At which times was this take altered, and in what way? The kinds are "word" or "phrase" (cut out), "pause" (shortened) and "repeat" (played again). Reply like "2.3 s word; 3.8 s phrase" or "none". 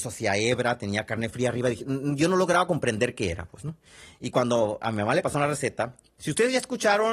none